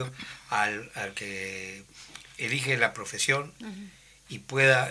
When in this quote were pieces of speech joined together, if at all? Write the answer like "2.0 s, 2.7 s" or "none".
none